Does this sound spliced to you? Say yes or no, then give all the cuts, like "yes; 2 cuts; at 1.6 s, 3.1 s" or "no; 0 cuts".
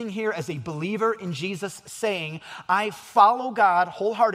no; 0 cuts